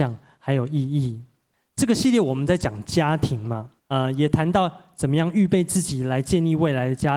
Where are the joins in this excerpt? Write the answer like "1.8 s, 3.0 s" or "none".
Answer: 1.5 s, 3.8 s